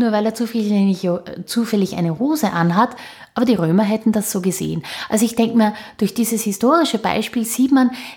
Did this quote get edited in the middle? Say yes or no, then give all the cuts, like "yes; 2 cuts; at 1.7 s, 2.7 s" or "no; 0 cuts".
no; 0 cuts